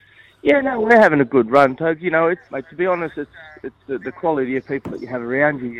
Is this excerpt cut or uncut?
cut